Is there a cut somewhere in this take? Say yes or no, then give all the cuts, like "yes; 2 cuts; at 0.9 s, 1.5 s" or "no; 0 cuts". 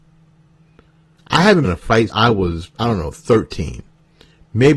yes; 3 cuts; at 1.6 s, 2.1 s, 2.7 s